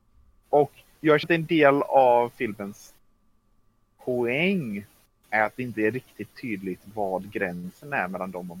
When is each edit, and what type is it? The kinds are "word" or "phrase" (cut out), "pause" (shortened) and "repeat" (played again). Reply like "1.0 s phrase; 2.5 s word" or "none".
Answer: 1.2 s word